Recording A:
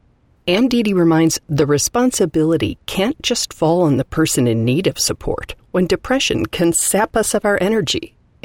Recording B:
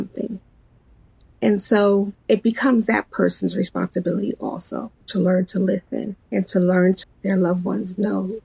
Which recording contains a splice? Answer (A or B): B